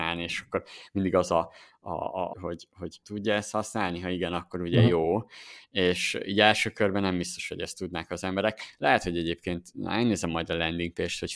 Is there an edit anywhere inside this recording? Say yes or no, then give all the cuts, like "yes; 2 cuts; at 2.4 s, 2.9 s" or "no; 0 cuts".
yes; 2 cuts; at 2.3 s, 3.0 s